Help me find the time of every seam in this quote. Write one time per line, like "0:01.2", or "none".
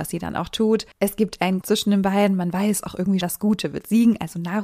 0:00.9
0:01.6
0:03.2

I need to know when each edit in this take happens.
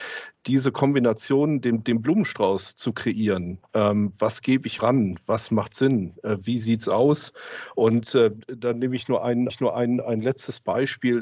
0:04.8
0:09.5

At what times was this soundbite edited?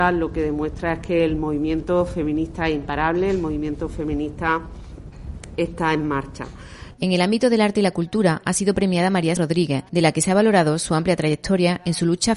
0:09.4
0:09.9

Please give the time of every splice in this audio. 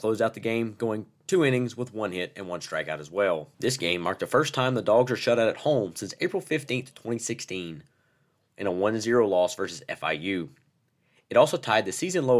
0:03.5

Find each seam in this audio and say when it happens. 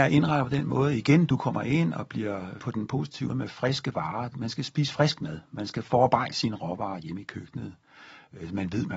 0:02.6
0:03.3

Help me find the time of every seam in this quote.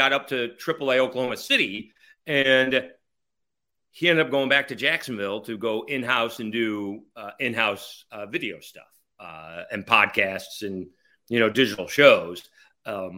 none

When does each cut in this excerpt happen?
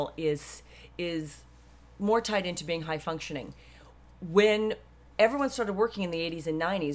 none

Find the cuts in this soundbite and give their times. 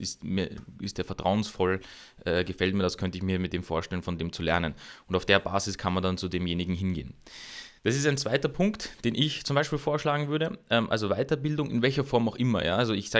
0:07.8

